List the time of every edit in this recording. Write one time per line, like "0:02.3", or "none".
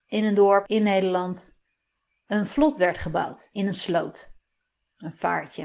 none